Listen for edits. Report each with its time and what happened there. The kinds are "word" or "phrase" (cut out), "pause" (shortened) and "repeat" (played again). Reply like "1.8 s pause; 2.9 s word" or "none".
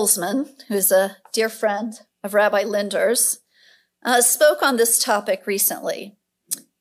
none